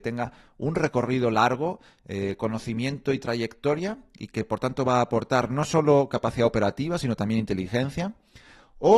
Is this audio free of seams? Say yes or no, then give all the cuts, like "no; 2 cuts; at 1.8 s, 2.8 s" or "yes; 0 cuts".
yes; 0 cuts